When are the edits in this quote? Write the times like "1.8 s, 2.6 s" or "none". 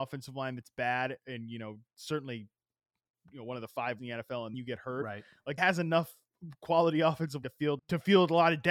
1.2 s, 4.0 s, 4.5 s, 5.6 s, 7.4 s, 7.8 s